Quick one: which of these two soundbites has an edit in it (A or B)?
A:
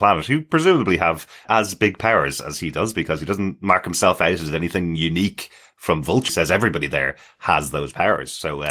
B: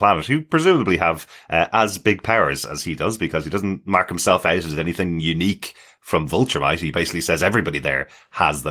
A